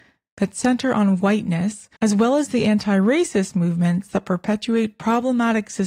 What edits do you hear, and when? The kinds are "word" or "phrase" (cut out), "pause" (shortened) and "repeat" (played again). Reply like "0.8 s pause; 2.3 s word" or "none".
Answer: 2.0 s pause